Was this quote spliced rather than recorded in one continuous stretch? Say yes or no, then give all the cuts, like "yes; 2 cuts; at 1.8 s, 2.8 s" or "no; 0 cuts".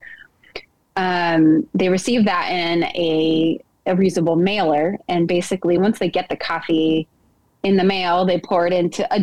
no; 0 cuts